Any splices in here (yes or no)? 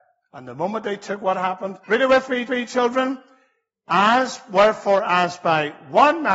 yes